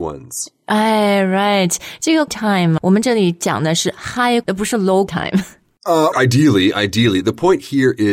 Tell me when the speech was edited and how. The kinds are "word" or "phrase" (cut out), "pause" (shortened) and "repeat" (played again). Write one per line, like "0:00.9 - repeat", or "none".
0:02.3 - word
0:02.8 - word
0:04.4 - word
0:05.1 - word
0:06.1 - word